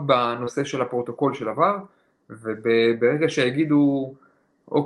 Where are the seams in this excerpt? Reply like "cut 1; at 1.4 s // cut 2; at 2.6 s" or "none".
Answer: none

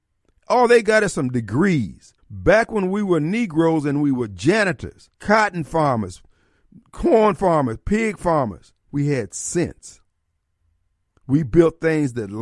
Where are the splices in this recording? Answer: cut 1; at 2.2 s // cut 2; at 5.2 s // cut 3; at 6.8 s // cut 4; at 8.8 s

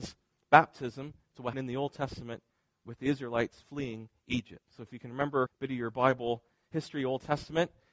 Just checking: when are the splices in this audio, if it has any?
cut 1; at 1.5 s // cut 2; at 5.5 s

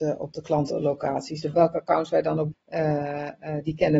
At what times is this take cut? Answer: cut 1; at 2.5 s

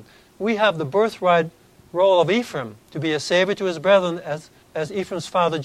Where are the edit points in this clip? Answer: cut 1; at 1.7 s // cut 2; at 2.8 s // cut 3; at 4.6 s

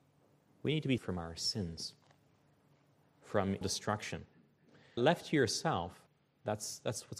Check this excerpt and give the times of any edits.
cut 1; at 1.0 s // cut 2; at 3.6 s // cut 3; at 5.0 s // cut 4; at 6.1 s

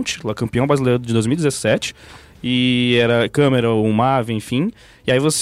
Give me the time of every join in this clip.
none

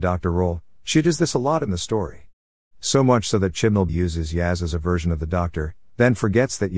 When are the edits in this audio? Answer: cut 1; at 3.9 s

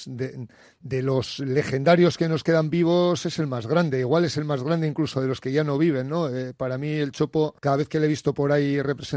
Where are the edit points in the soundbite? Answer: cut 1; at 7.6 s

